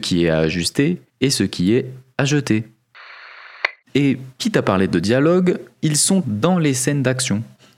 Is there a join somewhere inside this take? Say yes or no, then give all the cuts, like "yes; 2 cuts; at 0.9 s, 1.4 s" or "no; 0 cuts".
yes; 3 cuts; at 1.1 s, 4.3 s, 6.2 s